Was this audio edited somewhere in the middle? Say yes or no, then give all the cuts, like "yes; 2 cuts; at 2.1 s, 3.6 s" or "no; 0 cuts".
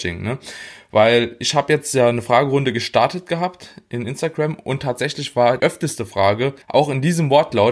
yes; 2 cuts; at 5.6 s, 6.6 s